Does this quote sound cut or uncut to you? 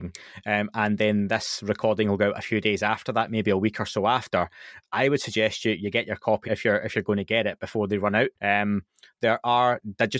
cut